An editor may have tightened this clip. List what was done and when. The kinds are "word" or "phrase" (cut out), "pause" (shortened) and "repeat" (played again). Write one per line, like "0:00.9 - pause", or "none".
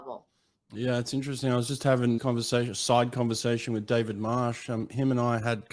0:02.2 - word